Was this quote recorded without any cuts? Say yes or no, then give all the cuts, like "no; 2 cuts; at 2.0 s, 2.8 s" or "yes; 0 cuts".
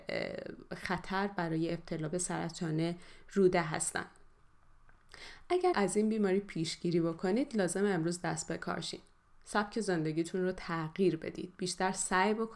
no; 1 cut; at 5.7 s